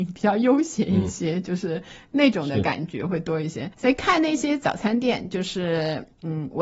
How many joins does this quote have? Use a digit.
1